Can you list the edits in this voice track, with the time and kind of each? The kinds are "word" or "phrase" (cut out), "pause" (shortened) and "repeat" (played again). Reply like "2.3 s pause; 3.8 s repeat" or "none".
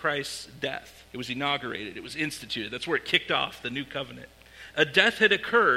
1.1 s pause